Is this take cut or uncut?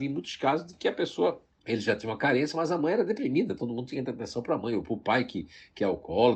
uncut